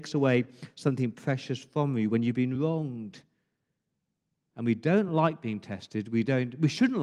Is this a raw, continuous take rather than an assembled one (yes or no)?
yes